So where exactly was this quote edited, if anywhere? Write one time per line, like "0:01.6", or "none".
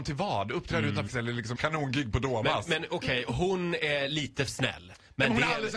0:01.1
0:01.6
0:04.5